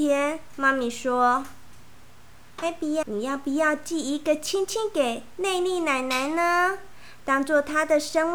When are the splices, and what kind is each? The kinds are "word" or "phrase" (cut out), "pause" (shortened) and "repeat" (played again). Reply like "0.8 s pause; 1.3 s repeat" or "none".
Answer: 3.0 s word